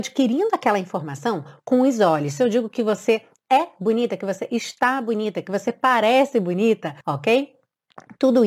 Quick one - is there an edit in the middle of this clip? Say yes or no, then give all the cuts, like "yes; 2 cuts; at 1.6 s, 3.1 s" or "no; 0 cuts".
yes; 1 cut; at 7.0 s